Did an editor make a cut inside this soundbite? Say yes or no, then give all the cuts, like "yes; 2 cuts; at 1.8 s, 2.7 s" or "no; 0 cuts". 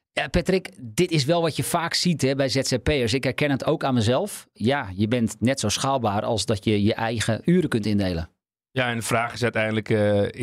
no; 0 cuts